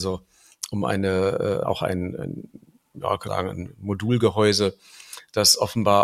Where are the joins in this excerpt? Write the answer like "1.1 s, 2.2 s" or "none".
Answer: 1.6 s, 2.1 s, 3.3 s